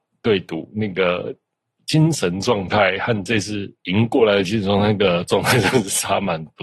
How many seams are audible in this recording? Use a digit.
0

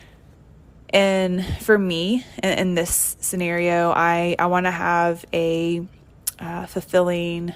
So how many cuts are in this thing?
0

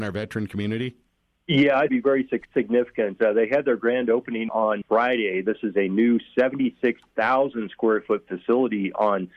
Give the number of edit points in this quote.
4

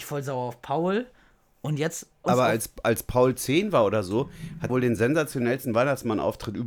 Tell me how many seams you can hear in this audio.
2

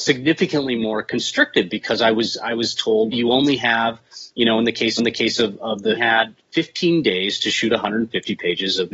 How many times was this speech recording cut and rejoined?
3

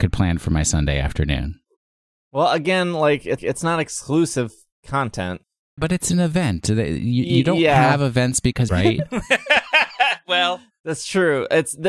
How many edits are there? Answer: 3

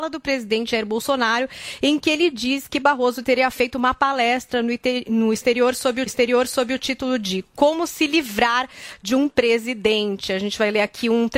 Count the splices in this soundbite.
1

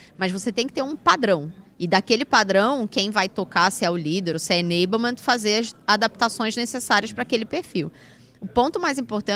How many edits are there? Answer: 0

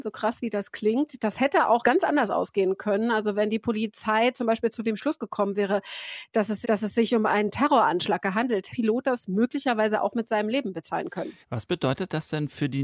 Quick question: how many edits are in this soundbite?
3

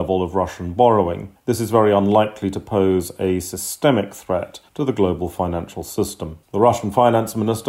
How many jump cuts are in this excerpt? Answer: 3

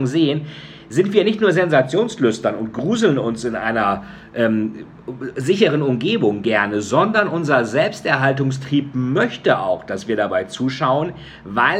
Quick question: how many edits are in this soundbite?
0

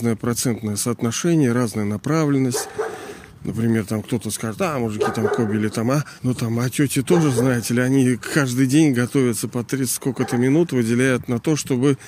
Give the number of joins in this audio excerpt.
1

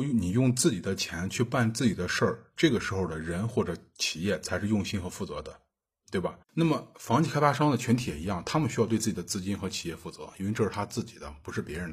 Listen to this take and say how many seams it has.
1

